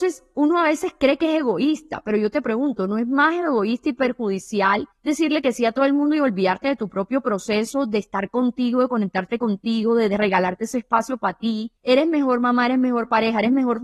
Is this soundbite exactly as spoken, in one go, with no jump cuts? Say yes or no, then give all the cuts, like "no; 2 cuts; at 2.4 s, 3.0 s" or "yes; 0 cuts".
no; 2 cuts; at 4.9 s, 11.8 s